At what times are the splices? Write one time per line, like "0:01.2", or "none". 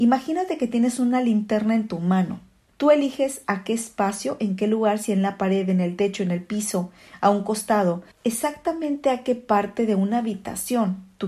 0:02.7
0:08.1